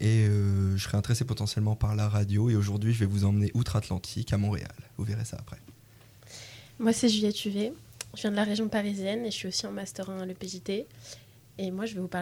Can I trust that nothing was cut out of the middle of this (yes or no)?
yes